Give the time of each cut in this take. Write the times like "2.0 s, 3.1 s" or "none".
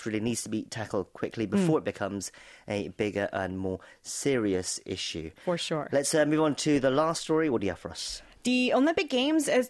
none